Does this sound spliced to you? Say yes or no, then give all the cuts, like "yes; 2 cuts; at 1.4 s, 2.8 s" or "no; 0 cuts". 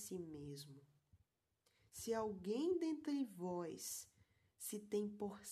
no; 0 cuts